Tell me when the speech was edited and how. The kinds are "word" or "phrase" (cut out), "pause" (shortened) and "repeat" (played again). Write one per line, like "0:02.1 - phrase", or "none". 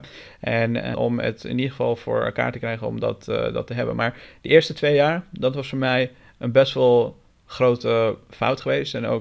0:00.9 - word